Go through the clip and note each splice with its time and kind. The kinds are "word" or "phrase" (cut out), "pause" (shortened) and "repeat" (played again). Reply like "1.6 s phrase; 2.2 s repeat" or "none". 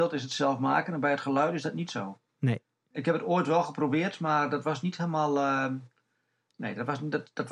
none